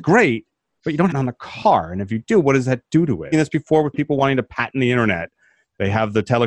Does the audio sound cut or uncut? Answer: cut